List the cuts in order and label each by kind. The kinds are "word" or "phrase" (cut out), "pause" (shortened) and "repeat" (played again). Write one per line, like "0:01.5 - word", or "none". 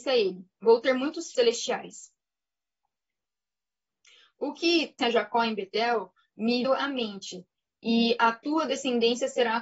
0:01.3 - word
0:05.0 - phrase
0:06.6 - word